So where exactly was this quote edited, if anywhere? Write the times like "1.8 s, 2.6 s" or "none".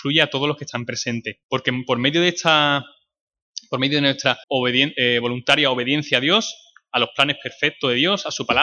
1.4 s, 4.4 s

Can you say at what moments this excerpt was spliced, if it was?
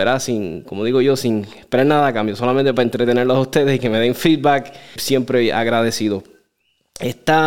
5.0 s

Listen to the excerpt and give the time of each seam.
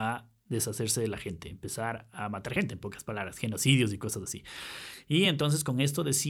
none

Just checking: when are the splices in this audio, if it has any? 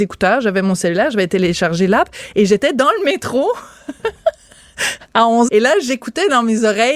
5.5 s

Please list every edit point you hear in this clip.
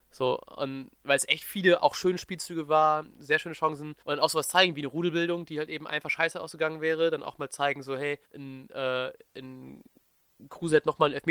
4.0 s, 8.2 s

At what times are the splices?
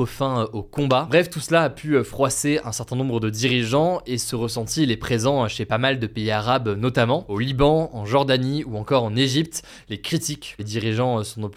10.6 s

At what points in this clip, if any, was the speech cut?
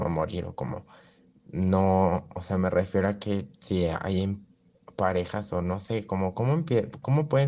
none

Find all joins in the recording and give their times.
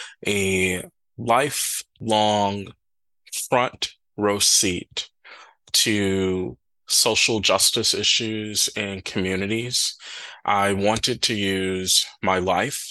none

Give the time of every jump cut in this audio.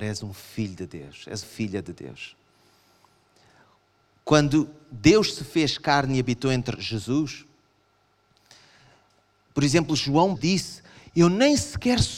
1.4 s, 6.8 s, 10.4 s

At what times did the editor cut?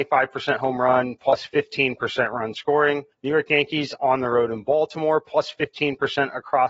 3.1 s

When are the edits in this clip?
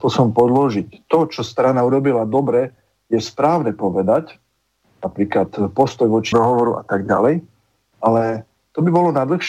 6.3 s

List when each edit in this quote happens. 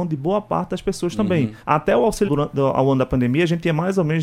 1.6 s, 2.3 s

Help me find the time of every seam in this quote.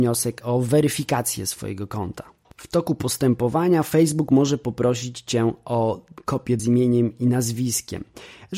6.6 s

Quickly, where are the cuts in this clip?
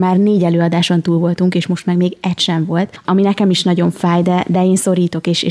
none

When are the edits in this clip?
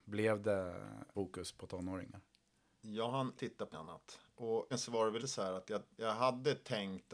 1.1 s, 3.3 s, 3.7 s, 4.7 s, 5.2 s

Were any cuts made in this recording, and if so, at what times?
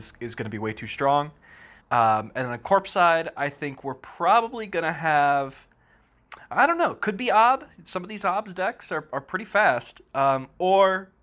1.8 s

